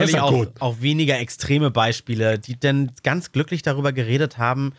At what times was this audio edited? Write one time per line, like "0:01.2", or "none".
none